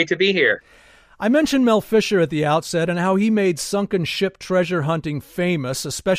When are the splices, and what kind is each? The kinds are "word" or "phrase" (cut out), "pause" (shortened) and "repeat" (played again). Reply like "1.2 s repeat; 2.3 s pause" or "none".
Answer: none